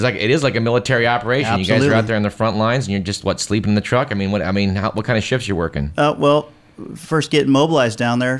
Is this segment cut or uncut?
uncut